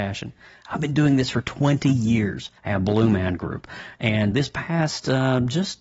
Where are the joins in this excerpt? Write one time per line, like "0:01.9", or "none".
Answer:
0:02.6
0:04.3